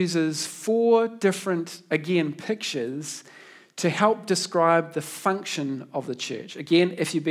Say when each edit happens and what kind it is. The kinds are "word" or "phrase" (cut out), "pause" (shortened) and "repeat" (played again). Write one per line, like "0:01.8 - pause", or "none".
none